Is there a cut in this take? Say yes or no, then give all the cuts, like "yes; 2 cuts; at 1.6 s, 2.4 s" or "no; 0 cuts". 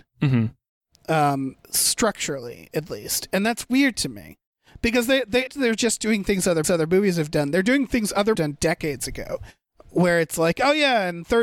yes; 4 cuts; at 1.6 s, 5.5 s, 6.6 s, 8.3 s